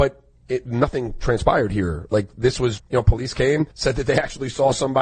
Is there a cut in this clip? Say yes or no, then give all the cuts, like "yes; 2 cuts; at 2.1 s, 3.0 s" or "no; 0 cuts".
yes; 2 cuts; at 2.8 s, 3.7 s